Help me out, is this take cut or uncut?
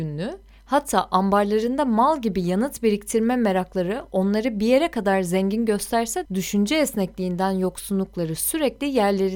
cut